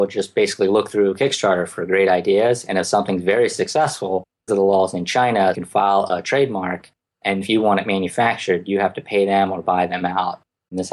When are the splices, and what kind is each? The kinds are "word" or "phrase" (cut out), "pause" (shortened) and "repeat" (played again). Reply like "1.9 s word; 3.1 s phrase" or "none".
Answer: 4.5 s word; 5.5 s word; 7.4 s word